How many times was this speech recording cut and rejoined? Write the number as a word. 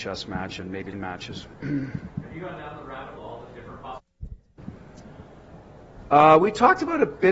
two